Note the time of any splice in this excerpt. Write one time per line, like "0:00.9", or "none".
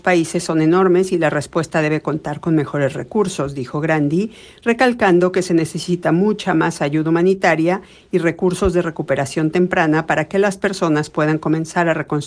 none